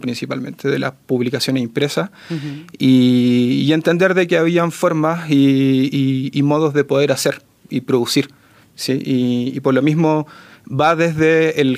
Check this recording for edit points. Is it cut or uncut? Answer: uncut